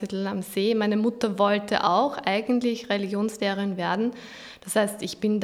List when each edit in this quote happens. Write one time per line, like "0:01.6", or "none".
none